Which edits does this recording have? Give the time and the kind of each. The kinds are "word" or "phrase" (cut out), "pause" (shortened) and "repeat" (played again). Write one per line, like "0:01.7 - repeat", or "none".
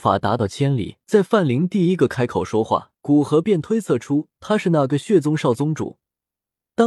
0:01.0 - pause
0:03.0 - pause